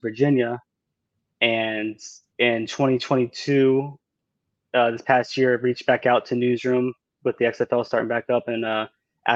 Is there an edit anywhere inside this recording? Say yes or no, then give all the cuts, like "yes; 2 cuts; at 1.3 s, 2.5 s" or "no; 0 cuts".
no; 0 cuts